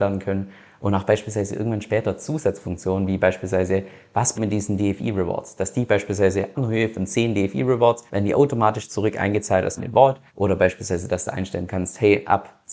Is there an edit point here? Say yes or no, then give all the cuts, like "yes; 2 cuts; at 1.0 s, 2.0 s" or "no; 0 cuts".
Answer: yes; 5 cuts; at 4.4 s, 6.5 s, 8.1 s, 9.8 s, 10.3 s